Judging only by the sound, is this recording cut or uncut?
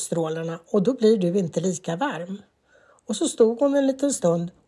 uncut